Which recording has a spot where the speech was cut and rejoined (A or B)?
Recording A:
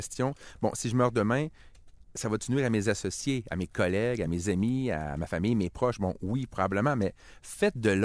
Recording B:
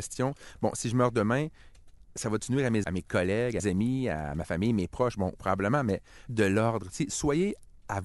B